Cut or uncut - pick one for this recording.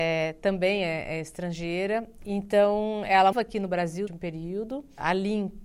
cut